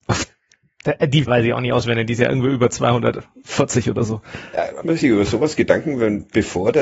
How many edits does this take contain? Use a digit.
2